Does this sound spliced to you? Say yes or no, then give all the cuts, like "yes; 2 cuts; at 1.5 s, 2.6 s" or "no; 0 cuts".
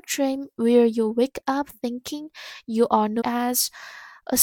yes; 1 cut; at 3.2 s